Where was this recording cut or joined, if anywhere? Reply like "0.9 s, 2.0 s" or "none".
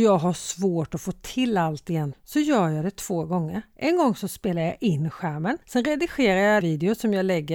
2.1 s, 5.6 s, 6.6 s

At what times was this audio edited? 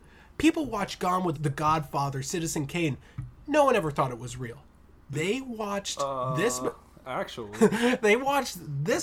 1.3 s

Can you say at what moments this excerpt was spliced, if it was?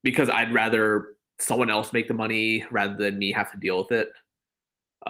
none

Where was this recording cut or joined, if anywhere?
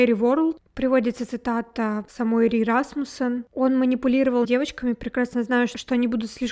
4.4 s

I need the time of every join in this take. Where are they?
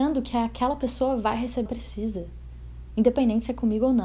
1.7 s

